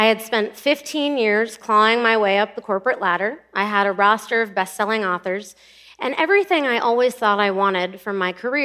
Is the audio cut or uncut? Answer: uncut